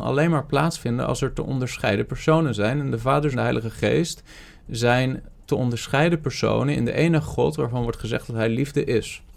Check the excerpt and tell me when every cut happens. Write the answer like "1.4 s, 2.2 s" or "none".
3.3 s